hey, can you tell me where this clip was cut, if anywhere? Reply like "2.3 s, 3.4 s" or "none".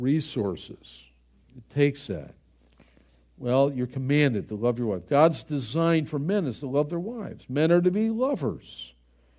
none

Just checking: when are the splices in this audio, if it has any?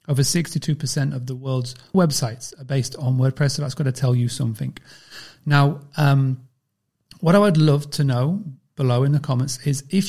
1.9 s

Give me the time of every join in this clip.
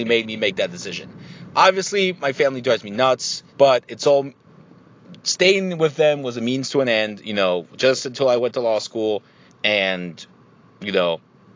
3.5 s, 9.5 s

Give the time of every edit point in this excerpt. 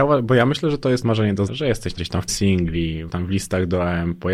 1.0 s, 1.5 s, 2.0 s, 2.3 s, 3.1 s

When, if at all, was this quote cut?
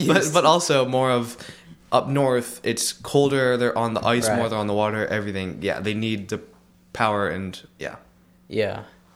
none

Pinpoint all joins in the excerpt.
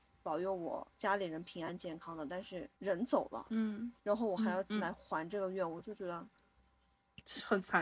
0.9 s, 2.8 s, 4.0 s

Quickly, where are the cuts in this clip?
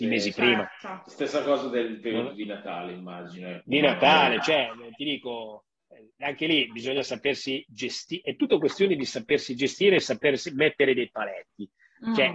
none

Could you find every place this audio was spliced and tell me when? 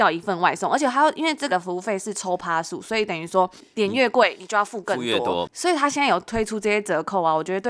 1.5 s

